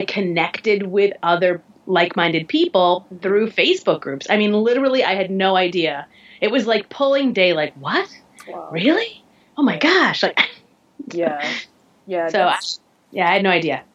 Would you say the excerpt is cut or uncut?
cut